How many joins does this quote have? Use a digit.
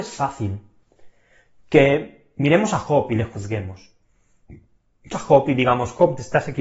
1